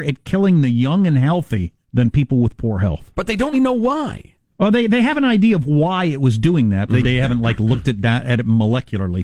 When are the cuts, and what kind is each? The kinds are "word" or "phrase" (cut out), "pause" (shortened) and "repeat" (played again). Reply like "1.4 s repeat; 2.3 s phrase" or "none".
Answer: 1.8 s pause; 3.5 s word; 4.5 s pause; 7.0 s word